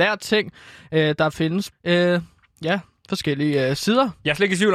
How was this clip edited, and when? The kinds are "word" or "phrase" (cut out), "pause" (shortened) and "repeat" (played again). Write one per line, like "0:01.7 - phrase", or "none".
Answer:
0:01.7 - word